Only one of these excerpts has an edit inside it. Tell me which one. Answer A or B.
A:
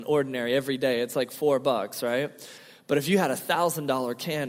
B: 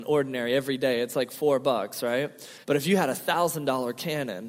B